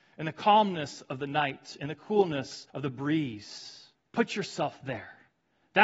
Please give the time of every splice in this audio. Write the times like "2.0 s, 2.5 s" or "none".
2.7 s, 3.9 s